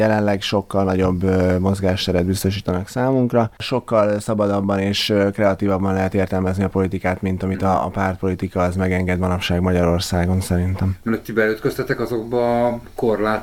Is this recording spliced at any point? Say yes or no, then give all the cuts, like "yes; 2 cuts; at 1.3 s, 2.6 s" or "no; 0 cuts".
no; 0 cuts